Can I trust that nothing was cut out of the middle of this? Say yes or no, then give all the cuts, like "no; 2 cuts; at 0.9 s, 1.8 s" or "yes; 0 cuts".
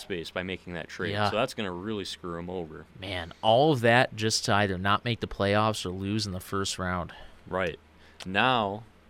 yes; 0 cuts